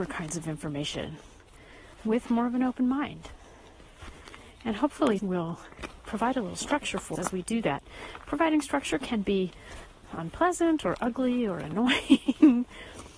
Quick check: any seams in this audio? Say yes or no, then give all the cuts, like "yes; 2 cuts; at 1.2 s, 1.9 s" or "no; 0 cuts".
yes; 4 cuts; at 1.9 s, 5.2 s, 7.2 s, 10.1 s